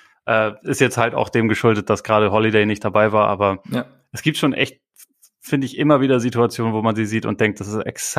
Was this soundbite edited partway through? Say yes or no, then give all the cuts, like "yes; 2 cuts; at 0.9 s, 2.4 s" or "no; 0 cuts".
no; 0 cuts